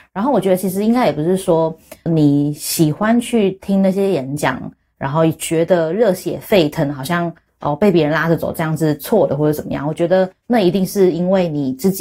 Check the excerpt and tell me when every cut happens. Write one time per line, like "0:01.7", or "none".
0:02.1